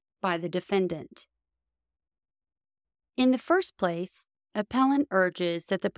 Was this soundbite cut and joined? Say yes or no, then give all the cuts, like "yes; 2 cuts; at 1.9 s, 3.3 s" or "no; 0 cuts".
no; 0 cuts